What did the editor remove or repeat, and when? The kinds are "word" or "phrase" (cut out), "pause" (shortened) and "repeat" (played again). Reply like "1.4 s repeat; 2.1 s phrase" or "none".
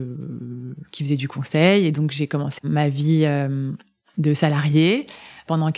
2.6 s word